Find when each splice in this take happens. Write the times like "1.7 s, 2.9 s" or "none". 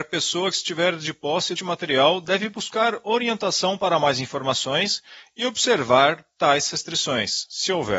1.5 s

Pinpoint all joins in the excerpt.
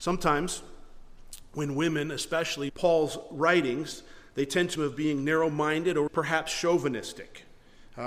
2.7 s, 4.7 s, 6.1 s

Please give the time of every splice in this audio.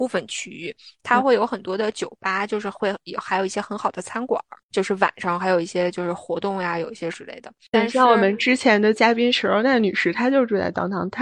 7.1 s

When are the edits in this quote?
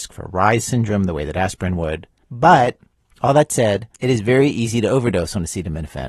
2.2 s, 3.9 s

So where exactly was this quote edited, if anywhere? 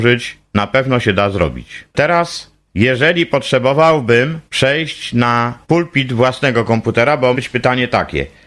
1.9 s, 4.5 s, 5.6 s, 7.3 s

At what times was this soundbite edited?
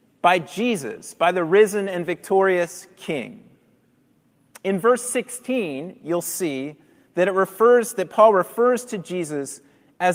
none

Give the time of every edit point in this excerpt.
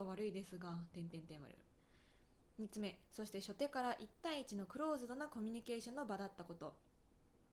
3.1 s

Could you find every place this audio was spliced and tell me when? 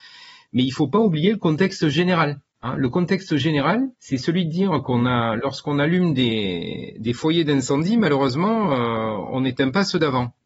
3.9 s

